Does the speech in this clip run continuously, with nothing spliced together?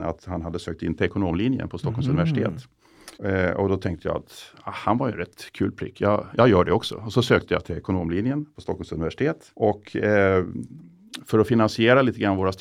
no; 2 cuts; at 3.1 s, 9.5 s

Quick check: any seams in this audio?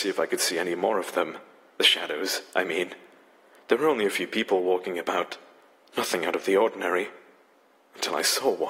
no; 0 cuts

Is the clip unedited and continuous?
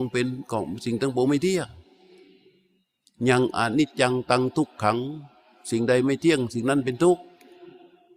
yes; 0 cuts

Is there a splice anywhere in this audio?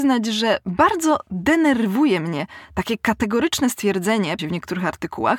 yes; 1 cut; at 4.4 s

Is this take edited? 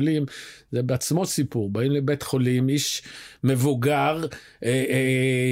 no; 0 cuts

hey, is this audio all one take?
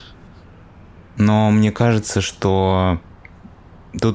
yes; 0 cuts

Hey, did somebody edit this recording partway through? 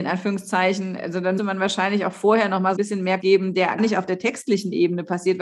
yes; 4 cuts; at 1.4 s, 2.8 s, 3.2 s, 3.8 s

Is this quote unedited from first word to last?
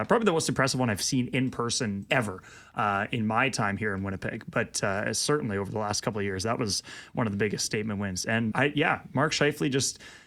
no; 2 cuts; at 2.1 s, 8.5 s

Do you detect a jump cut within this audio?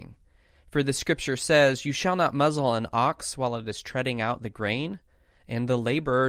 no; 0 cuts

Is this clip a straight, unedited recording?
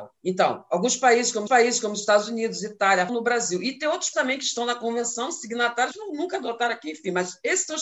no; 4 cuts; at 1.5 s, 3.1 s, 4.1 s, 5.9 s

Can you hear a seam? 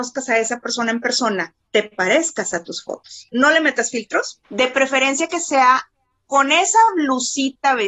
no; 0 cuts

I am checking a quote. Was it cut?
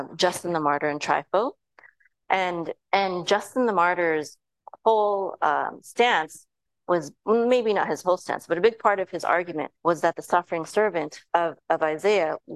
yes; 4 cuts; at 2.8 s, 7.2 s, 9.8 s, 11.3 s

